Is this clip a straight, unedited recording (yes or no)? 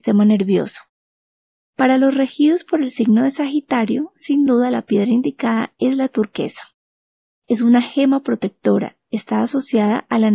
yes